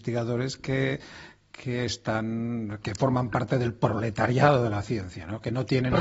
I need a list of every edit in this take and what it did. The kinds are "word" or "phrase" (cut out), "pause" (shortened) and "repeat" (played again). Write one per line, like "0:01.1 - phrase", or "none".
none